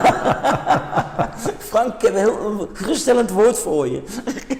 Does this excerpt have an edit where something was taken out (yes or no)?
no